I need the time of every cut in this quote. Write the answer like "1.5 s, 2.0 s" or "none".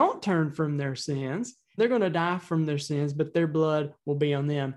1.8 s

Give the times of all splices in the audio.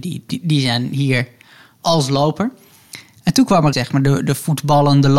3.7 s

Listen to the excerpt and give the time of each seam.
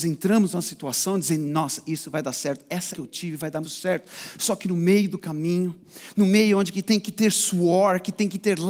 2.9 s, 3.6 s

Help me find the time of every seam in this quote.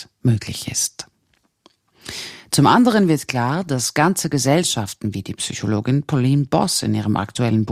none

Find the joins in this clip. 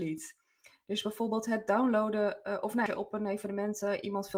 2.9 s

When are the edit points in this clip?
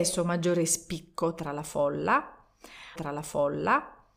3.0 s

